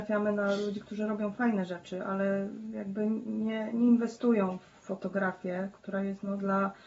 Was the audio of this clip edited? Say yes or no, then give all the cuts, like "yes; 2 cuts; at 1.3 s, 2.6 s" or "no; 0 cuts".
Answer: no; 0 cuts